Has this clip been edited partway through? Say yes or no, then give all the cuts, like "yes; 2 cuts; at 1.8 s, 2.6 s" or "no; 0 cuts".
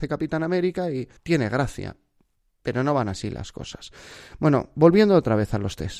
yes; 2 cuts; at 1.2 s, 2.3 s